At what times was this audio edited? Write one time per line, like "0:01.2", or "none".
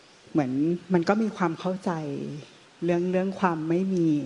0:02.6